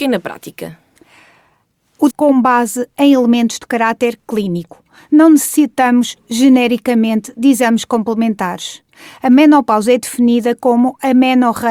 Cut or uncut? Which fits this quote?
cut